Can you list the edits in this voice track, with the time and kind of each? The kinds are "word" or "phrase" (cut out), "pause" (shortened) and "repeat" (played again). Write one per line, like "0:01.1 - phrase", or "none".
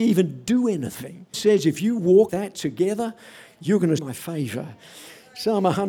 0:01.3 - word
0:02.3 - word
0:04.0 - word